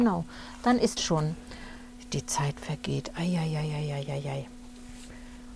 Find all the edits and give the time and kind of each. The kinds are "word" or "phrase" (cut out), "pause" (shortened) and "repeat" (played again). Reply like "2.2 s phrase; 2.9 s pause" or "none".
1.0 s word